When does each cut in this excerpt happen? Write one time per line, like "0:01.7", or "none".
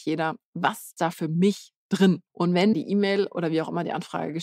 0:01.0
0:02.3
0:02.7